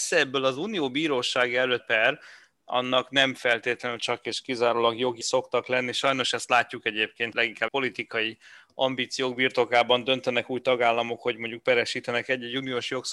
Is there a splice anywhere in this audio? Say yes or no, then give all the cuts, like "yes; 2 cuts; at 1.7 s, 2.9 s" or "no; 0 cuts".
yes; 4 cuts; at 1.8 s, 5.2 s, 7.3 s, 7.7 s